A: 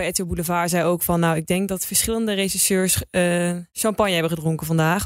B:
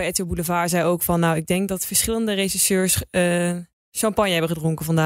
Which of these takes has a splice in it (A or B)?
A